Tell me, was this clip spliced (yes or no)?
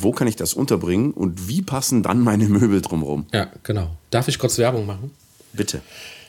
no